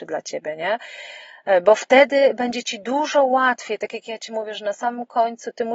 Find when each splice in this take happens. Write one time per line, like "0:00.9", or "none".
none